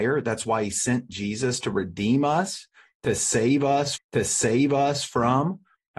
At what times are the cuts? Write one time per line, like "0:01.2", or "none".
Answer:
0:04.0